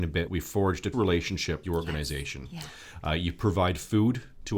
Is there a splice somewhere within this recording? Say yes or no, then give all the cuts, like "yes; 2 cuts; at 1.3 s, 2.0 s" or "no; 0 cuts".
yes; 2 cuts; at 0.9 s, 1.6 s